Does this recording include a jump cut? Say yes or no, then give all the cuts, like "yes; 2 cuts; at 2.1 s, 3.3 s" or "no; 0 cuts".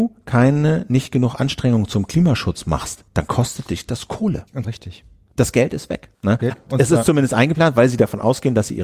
yes; 4 cuts; at 3.1 s, 4.6 s, 6.1 s, 6.5 s